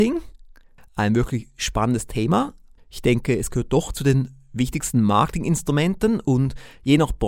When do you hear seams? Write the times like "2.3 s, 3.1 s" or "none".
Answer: 2.8 s